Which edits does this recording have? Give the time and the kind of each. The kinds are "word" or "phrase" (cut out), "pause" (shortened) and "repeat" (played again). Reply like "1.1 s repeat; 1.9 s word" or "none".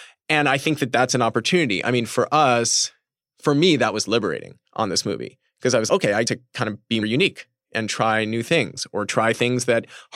4.7 s pause; 5.9 s word; 6.2 s word; 7.0 s word